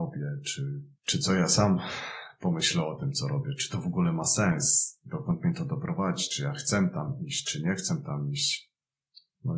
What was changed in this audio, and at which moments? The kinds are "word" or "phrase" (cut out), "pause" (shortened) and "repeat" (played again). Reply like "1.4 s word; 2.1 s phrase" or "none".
1.0 s pause